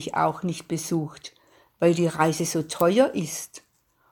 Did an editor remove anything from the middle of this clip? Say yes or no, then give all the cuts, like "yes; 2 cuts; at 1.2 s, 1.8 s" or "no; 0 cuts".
no; 0 cuts